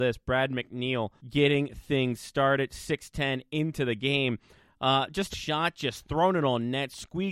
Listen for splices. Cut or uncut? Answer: cut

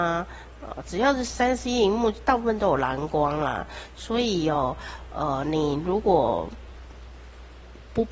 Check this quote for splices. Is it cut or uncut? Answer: uncut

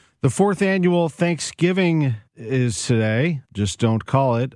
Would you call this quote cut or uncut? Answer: cut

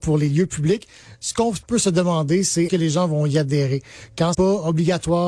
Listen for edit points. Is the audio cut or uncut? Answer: cut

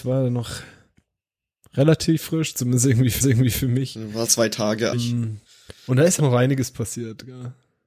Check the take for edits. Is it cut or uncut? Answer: cut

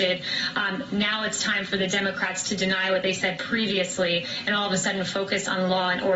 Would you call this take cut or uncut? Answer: uncut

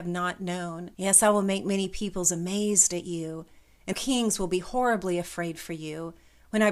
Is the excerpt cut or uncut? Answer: cut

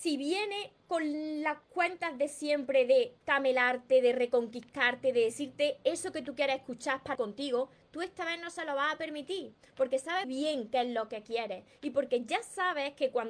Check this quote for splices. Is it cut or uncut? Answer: cut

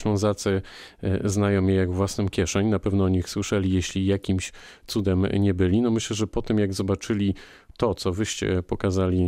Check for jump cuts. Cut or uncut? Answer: uncut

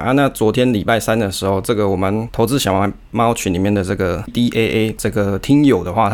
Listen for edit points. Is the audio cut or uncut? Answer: cut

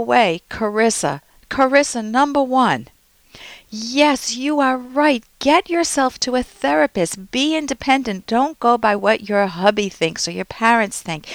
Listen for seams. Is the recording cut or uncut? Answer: uncut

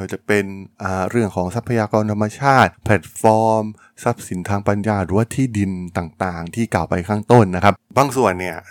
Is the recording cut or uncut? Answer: uncut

